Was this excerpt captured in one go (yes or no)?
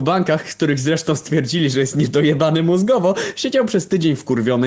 yes